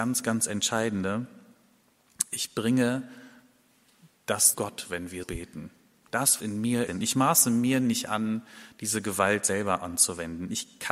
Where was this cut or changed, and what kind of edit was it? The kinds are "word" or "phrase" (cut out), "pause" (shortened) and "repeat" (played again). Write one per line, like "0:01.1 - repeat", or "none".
0:04.5 - word
0:05.2 - word
0:06.4 - word
0:06.9 - phrase